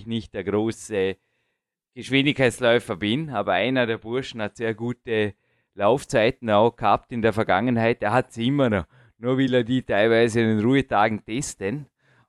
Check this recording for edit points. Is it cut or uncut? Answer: uncut